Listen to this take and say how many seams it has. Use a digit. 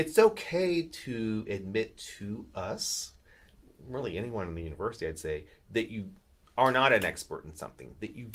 0